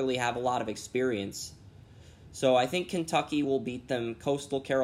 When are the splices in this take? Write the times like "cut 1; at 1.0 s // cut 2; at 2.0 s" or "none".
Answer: none

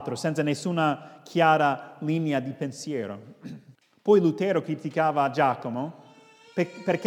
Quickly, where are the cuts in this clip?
cut 1; at 3.8 s

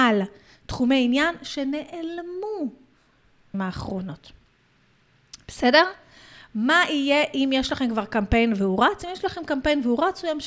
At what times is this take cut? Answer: cut 1; at 3.5 s

